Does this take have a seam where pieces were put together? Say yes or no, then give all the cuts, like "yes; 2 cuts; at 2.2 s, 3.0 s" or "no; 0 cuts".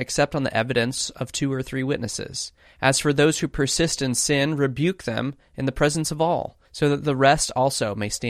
yes; 2 cuts; at 2.6 s, 6.7 s